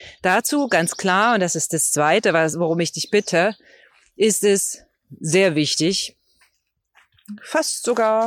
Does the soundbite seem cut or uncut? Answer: uncut